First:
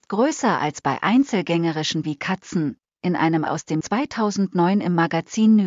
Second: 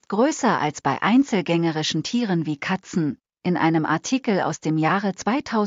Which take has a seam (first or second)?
first